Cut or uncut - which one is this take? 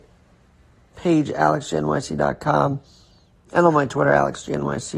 uncut